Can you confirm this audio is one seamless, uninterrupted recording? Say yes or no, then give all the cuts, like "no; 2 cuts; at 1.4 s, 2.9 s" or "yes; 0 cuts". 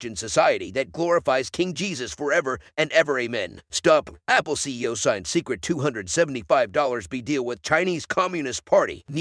yes; 0 cuts